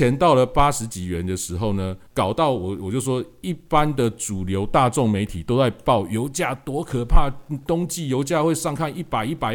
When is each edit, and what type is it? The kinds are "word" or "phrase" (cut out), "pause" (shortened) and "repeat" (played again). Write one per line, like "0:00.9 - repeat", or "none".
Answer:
0:02.1 - pause